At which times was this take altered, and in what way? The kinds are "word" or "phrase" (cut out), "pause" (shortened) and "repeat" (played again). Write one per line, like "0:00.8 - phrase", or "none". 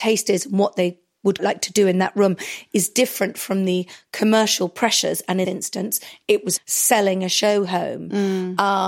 0:01.4 - word
0:05.4 - word
0:06.6 - word